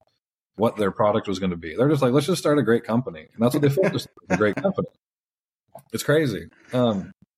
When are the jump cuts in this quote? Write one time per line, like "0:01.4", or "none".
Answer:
none